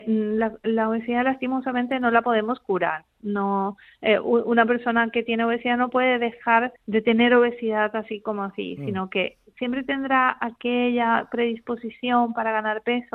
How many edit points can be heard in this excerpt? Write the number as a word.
one